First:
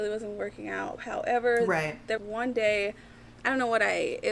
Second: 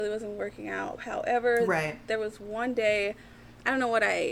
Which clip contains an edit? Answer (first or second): first